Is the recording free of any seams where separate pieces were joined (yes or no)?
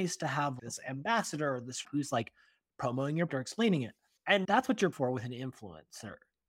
no